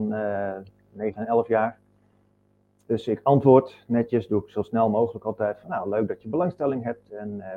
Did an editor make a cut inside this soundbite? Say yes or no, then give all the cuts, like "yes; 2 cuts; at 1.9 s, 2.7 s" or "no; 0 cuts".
no; 0 cuts